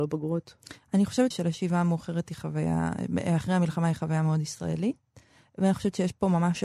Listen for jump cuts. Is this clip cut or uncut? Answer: cut